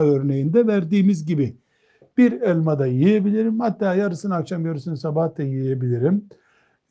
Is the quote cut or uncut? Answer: uncut